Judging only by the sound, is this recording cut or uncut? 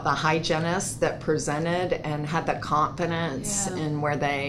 uncut